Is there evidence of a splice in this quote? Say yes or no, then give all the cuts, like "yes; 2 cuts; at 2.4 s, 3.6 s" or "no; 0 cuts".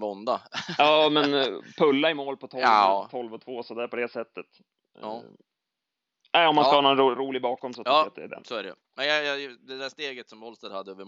no; 0 cuts